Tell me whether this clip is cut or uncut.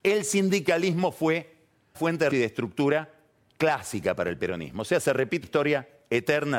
cut